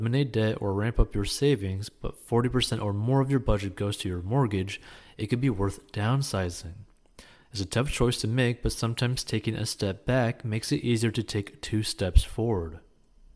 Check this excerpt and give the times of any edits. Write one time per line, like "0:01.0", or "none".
none

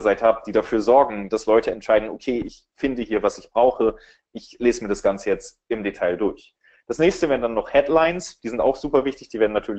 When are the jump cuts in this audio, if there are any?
none

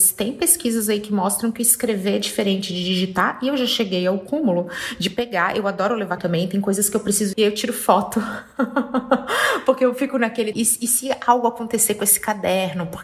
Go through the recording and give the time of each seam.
0:06.2
0:07.3
0:10.5

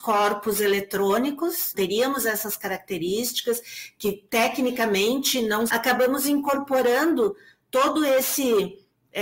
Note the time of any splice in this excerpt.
0:01.7
0:05.7

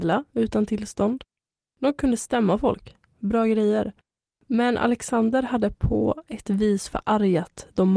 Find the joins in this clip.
none

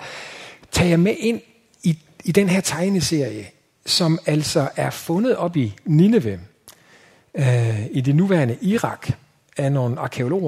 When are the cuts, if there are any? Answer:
none

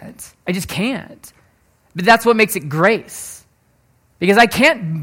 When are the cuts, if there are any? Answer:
none

